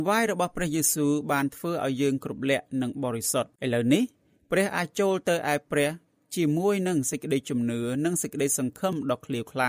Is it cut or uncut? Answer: cut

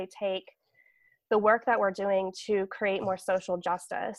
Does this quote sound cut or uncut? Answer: uncut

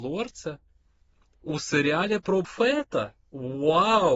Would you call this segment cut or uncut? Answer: cut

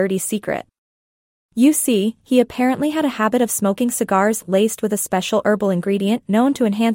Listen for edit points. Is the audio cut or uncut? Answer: uncut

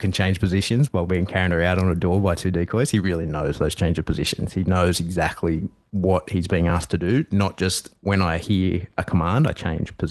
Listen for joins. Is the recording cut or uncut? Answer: uncut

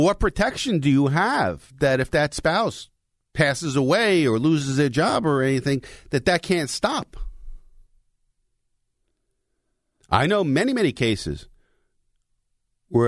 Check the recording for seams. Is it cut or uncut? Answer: uncut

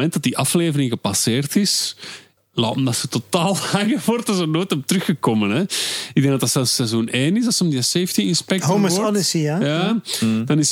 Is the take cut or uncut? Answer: cut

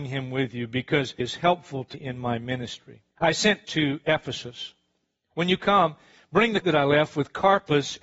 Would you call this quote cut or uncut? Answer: cut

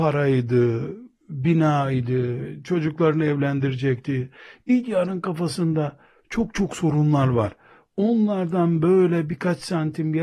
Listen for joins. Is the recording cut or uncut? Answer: uncut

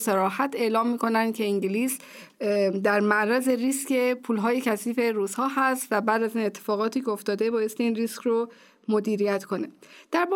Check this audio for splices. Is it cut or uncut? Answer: uncut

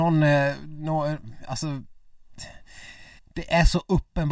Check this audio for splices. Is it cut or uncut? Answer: cut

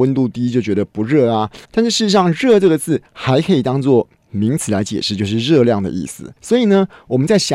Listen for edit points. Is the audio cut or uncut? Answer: cut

